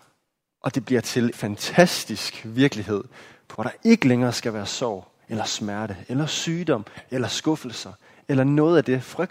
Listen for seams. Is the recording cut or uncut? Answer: cut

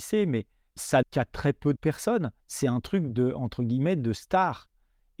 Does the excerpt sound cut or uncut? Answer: cut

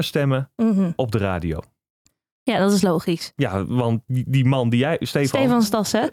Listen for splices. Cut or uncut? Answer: uncut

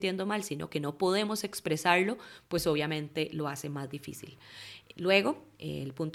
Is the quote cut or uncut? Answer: uncut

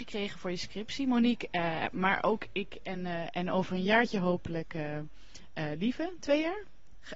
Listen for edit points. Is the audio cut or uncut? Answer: uncut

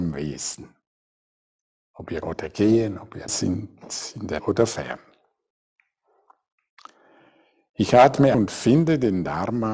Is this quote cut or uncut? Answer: cut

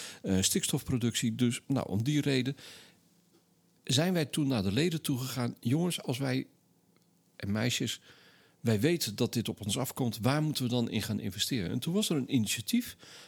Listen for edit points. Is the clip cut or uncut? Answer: uncut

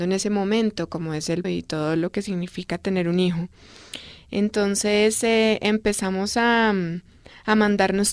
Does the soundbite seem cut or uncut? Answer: cut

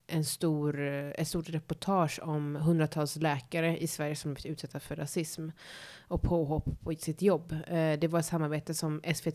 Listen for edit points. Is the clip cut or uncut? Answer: uncut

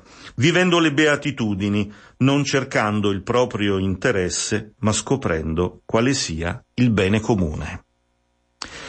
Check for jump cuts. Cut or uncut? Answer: uncut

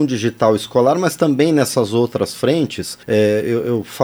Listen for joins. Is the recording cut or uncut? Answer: cut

